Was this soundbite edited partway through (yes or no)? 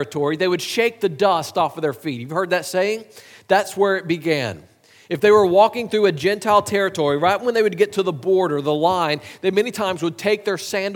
no